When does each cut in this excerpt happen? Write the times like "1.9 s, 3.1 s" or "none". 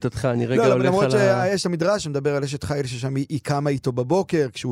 none